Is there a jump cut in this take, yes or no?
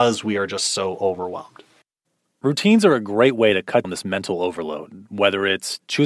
yes